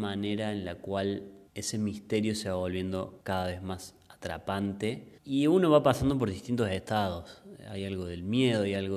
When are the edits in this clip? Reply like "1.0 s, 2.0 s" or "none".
1.5 s, 3.2 s, 5.2 s